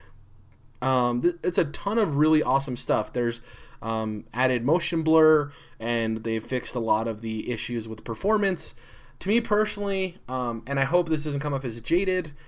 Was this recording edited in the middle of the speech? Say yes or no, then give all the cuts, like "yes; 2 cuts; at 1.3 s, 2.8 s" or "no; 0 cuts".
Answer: no; 0 cuts